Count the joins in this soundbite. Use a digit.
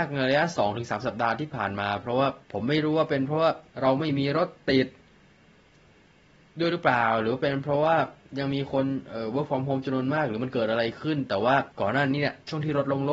3